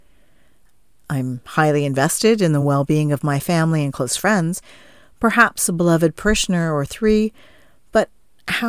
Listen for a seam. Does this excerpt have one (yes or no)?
no